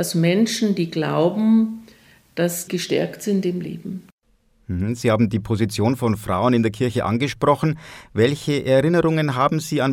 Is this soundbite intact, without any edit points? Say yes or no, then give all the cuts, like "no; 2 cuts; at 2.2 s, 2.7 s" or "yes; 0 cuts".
no; 1 cut; at 2.7 s